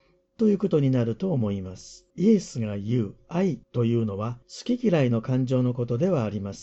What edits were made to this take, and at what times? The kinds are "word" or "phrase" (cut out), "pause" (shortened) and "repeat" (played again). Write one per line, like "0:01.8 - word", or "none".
0:02.1 - pause
0:03.6 - pause
0:04.4 - pause